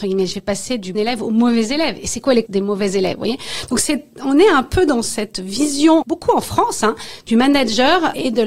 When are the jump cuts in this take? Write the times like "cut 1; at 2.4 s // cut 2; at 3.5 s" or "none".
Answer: cut 1; at 0.9 s // cut 2; at 2.5 s // cut 3; at 6.0 s